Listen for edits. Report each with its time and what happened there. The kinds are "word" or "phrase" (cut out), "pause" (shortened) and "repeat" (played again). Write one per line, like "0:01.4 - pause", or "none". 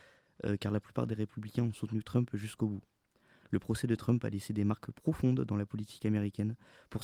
none